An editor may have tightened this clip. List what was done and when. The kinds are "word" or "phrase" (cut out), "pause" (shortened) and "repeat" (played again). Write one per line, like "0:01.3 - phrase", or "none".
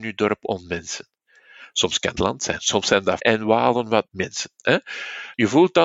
0:02.2 - phrase
0:03.2 - word
0:04.1 - word